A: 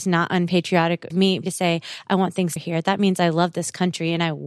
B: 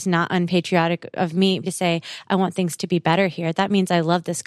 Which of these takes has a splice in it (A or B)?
A